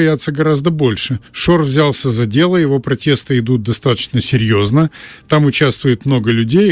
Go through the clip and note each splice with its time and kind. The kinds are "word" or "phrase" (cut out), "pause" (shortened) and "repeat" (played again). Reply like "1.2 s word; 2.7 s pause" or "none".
1.3 s pause